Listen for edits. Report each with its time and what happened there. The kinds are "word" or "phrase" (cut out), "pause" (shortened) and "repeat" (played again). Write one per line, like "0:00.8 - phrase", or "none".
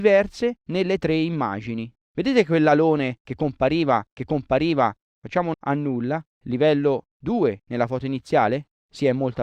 0:04.2 - repeat
0:05.5 - word
0:06.3 - word